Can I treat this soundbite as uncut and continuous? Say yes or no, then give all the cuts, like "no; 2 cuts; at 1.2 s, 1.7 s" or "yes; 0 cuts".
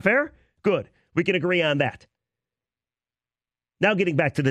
yes; 0 cuts